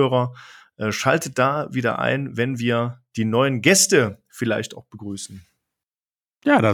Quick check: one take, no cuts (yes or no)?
yes